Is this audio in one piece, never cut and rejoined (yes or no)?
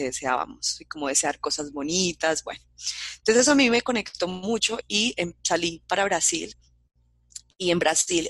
yes